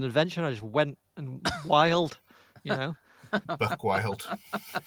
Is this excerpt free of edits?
yes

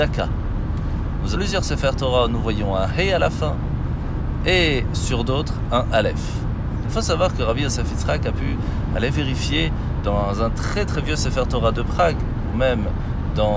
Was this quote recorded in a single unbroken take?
no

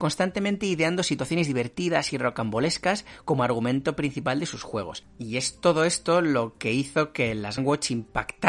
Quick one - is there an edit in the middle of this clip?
yes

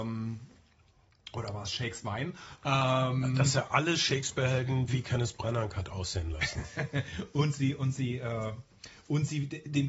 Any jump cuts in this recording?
no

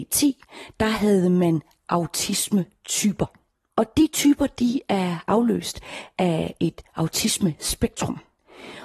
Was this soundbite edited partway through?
no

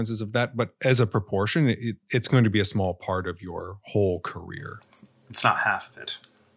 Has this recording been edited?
no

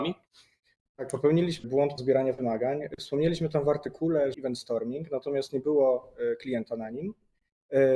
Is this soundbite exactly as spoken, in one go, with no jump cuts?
no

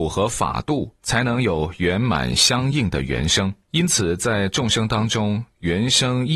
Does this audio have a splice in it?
yes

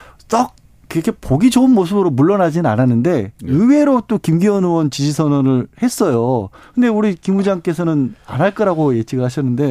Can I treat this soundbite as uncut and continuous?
yes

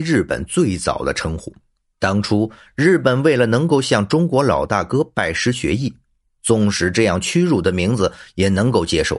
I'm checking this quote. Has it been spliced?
no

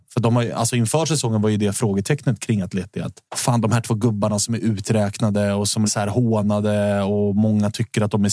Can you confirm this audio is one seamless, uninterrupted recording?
no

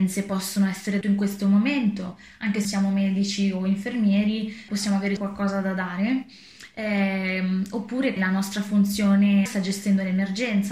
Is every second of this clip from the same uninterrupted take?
no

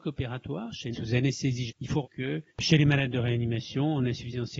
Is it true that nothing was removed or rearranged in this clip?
no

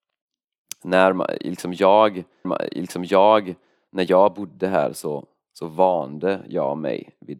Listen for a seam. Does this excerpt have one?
yes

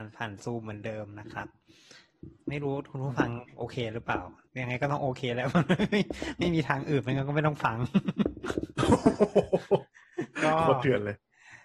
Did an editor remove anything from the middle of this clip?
yes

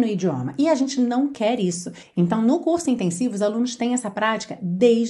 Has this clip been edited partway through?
no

